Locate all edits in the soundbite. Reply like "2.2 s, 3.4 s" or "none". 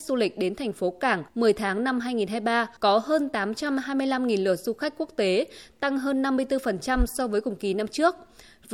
1.3 s, 2.8 s